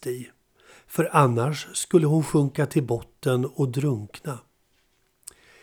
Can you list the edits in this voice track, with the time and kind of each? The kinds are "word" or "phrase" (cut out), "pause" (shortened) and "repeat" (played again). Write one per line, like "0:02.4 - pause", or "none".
none

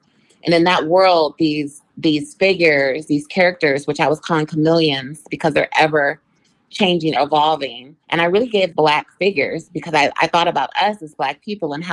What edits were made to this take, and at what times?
0:01.9 - pause
0:07.2 - word
0:08.0 - pause
0:08.7 - phrase

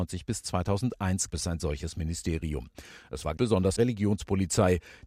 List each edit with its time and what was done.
0:01.3 - word
0:03.4 - word
0:03.8 - word

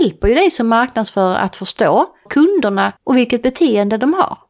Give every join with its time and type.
0:02.3 - phrase
0:03.0 - pause

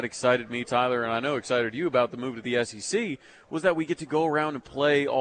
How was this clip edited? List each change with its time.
none

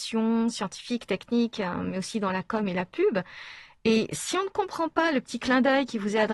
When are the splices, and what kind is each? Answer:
none

